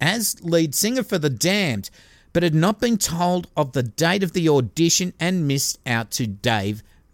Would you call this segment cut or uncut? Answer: uncut